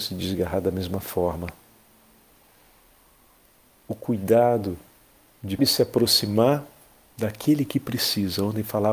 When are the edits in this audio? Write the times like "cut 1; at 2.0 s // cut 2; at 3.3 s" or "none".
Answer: cut 1; at 5.6 s